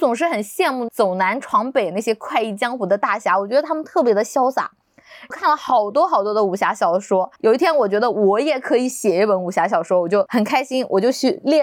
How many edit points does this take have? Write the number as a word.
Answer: one